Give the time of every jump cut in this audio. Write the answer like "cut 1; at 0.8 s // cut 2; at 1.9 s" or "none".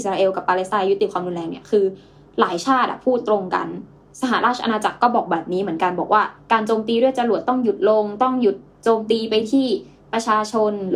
none